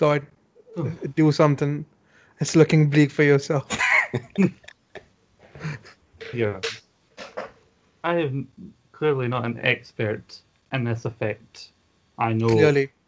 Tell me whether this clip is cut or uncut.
cut